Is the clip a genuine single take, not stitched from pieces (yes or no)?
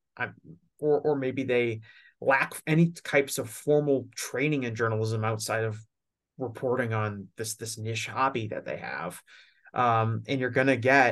yes